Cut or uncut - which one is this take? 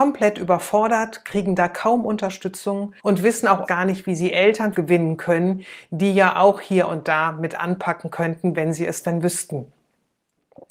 cut